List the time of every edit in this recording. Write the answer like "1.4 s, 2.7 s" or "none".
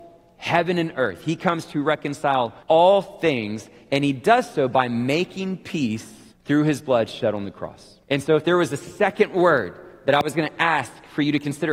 2.6 s, 6.3 s, 8.0 s